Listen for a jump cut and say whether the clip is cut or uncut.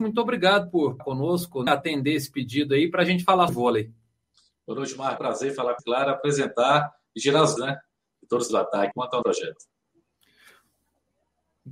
cut